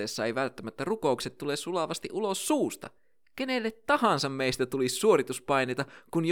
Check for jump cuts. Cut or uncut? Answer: uncut